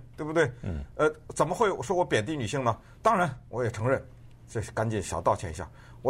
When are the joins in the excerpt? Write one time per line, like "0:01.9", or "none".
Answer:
0:03.5